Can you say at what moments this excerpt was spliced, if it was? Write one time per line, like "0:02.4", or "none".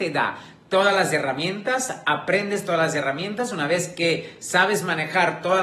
none

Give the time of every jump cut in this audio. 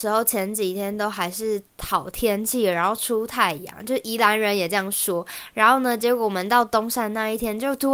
0:01.7

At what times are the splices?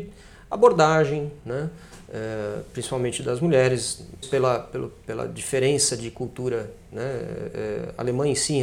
0:04.2

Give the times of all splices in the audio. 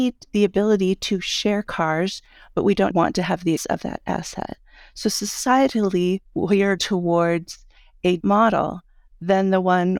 0:02.9
0:03.6
0:06.8
0:08.2

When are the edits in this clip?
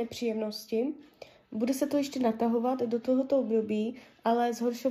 none

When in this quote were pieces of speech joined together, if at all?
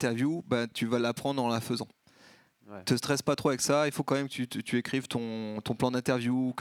none

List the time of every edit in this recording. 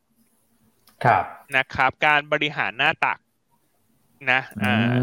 0:01.4

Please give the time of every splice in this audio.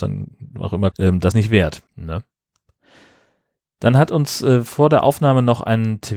0:00.9
0:01.3
0:01.9

